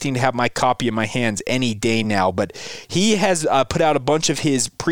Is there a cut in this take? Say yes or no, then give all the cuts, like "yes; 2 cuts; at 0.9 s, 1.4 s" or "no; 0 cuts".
no; 0 cuts